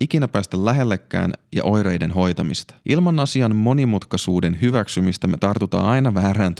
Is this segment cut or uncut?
cut